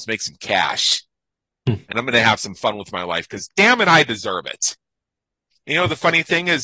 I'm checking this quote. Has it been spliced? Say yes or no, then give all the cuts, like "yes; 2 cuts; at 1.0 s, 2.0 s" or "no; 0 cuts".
no; 0 cuts